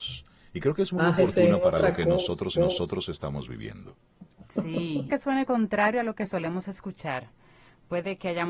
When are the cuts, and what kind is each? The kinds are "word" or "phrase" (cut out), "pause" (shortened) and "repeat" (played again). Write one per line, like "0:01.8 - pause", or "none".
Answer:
0:02.5 - repeat
0:05.1 - phrase